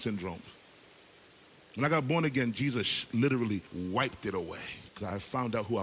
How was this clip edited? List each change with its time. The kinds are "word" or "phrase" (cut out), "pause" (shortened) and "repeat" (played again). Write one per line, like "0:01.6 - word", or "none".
0:03.7 - pause
0:04.9 - pause